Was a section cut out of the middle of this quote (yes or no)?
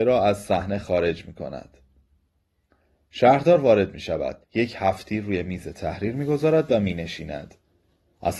yes